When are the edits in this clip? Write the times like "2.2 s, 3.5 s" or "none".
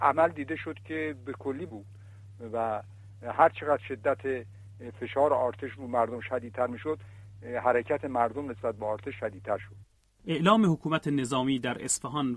1.7 s